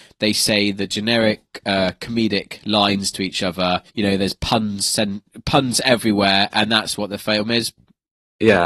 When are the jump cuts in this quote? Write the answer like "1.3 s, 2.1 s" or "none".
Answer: 3.9 s